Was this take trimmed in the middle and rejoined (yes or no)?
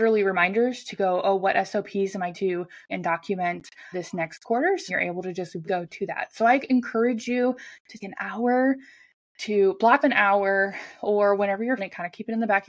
yes